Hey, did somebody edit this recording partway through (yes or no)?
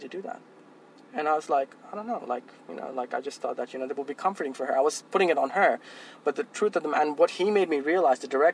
no